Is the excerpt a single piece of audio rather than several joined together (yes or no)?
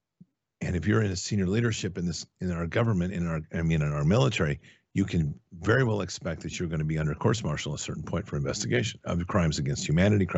yes